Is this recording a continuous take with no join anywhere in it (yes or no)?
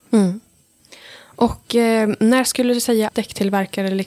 no